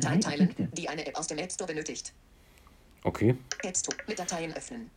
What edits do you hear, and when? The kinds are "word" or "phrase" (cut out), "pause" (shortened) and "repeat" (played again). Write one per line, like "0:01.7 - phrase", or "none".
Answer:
none